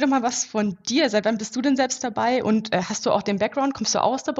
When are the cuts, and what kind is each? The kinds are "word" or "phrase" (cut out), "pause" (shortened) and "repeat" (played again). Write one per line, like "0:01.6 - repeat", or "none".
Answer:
none